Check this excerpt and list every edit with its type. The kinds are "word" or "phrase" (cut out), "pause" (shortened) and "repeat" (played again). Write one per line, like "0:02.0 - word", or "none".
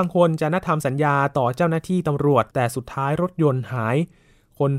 0:02.5 - pause